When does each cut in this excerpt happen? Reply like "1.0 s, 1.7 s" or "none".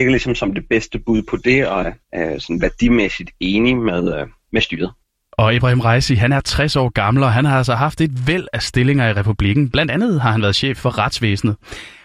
2.0 s, 5.0 s